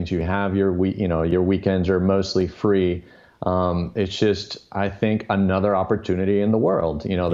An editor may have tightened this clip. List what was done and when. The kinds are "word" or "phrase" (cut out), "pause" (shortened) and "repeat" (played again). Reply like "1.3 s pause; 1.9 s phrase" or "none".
none